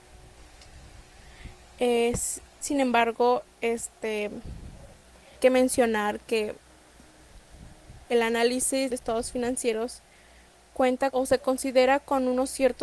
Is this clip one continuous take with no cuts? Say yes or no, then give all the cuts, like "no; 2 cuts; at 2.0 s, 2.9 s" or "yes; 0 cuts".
no; 5 cuts; at 2.6 s, 5.4 s, 8.1 s, 8.9 s, 11.1 s